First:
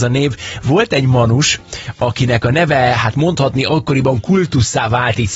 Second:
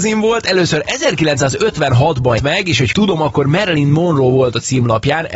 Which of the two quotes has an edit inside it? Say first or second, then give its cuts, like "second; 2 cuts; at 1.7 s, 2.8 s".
second; 2 cuts; at 2.4 s, 2.9 s